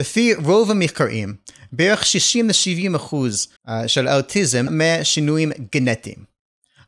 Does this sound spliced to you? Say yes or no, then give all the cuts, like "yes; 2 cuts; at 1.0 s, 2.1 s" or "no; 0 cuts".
yes; 2 cuts; at 3.6 s, 4.7 s